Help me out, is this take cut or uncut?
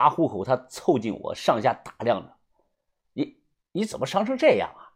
uncut